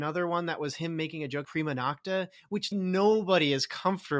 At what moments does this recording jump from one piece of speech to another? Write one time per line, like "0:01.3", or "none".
0:01.4
0:02.7